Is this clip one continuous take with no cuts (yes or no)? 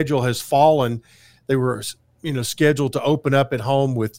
yes